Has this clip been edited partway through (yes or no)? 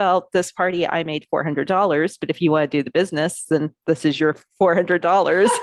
no